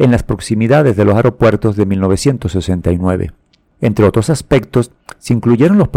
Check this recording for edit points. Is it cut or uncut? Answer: uncut